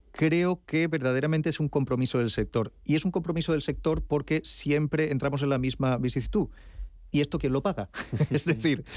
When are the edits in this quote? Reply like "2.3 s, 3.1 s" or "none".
2.8 s